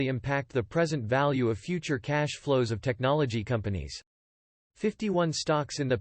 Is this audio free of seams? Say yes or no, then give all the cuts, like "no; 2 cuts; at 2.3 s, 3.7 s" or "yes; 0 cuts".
yes; 0 cuts